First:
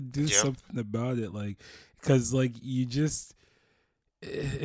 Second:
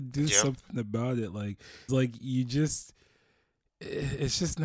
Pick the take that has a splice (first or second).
second